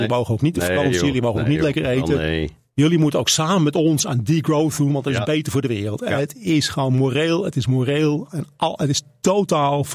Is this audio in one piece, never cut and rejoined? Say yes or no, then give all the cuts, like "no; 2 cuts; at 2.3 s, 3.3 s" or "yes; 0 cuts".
yes; 0 cuts